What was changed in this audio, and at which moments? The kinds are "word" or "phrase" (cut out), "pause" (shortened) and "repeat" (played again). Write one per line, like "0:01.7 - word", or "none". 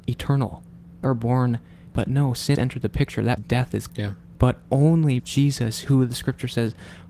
0:01.0 - word
0:01.9 - word
0:02.5 - word
0:03.4 - word
0:03.9 - word
0:05.2 - word